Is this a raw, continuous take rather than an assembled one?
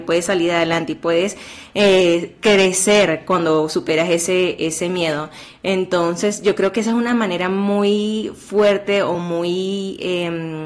yes; 0 cuts

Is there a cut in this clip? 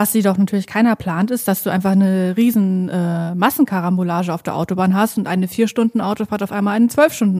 no; 0 cuts

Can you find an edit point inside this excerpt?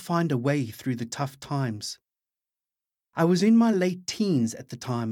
no; 0 cuts

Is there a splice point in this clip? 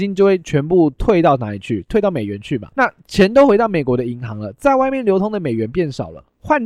yes; 1 cut; at 2.7 s

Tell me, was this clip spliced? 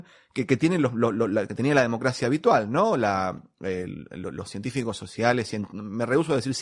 no; 0 cuts

